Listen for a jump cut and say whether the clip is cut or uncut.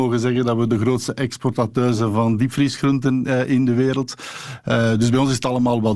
uncut